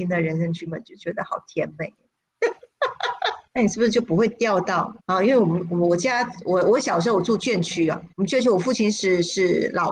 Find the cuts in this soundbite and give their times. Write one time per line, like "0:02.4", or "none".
0:03.5
0:05.0
0:08.1

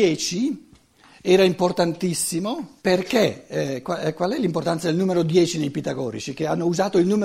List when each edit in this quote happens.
0:02.8

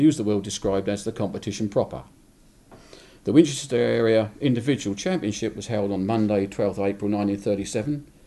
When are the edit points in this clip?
none

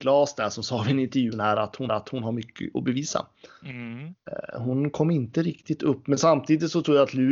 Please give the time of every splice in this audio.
0:01.3
0:01.9

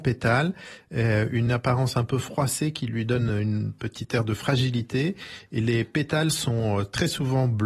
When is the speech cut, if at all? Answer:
none

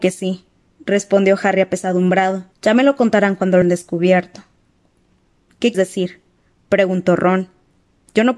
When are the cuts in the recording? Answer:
0:02.5
0:03.6
0:05.7

